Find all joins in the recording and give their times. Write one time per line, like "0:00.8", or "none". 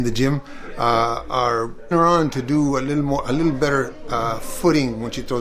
0:01.9